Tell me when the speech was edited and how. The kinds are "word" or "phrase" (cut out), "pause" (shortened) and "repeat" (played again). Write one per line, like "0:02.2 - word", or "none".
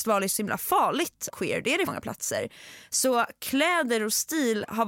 0:01.3 - phrase
0:01.9 - phrase

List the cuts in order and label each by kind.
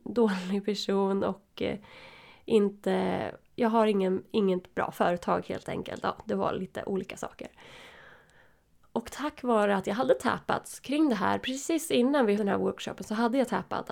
0:12.4 - word

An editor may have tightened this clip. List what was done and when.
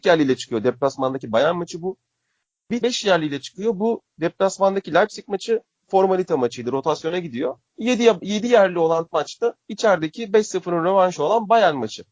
0:02.8 - word
0:07.7 - pause
0:09.1 - word

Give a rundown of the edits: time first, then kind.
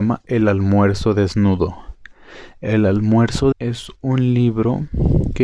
0:03.5 - word

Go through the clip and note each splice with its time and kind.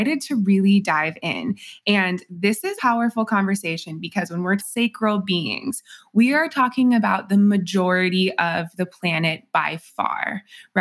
0:02.8 - word
0:04.6 - phrase

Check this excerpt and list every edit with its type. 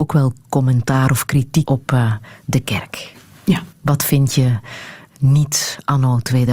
0:01.6 - word
0:03.7 - pause

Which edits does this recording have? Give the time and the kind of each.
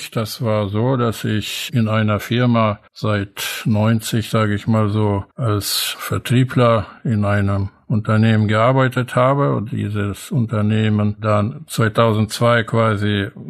0:02.9 - pause
0:05.3 - pause

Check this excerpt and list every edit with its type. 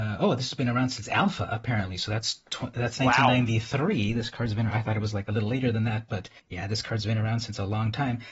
0:06.4 - pause

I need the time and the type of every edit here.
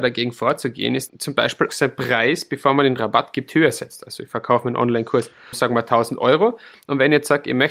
0:01.1 - phrase
0:01.7 - word
0:05.5 - word

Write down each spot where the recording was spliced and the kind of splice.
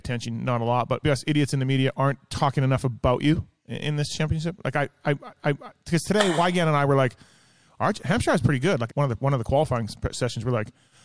0:01.0 - word
0:05.4 - repeat
0:08.9 - phrase

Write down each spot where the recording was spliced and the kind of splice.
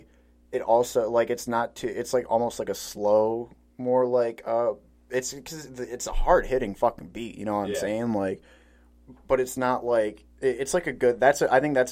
none

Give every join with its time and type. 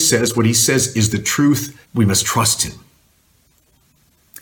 0:01.8 - pause

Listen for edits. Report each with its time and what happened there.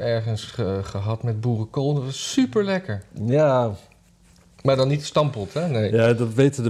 none

